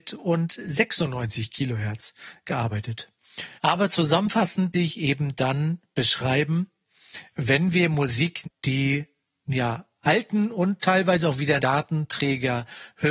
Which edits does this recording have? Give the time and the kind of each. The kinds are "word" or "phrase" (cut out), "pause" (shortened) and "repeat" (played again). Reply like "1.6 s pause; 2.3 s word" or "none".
3.6 s pause; 4.7 s word; 8.4 s phrase; 9.9 s pause; 11.6 s word